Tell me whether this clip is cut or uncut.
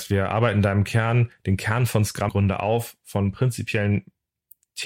cut